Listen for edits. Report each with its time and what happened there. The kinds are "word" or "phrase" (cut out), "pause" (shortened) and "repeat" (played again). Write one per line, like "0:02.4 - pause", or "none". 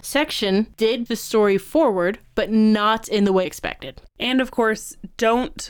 0:01.1 - word
0:03.4 - word
0:04.1 - pause